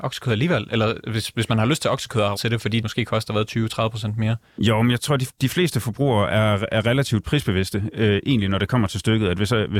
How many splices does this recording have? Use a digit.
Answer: 3